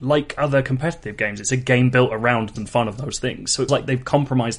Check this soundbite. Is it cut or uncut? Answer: cut